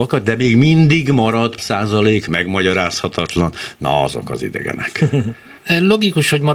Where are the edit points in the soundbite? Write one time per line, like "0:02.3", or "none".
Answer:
0:01.6
0:05.6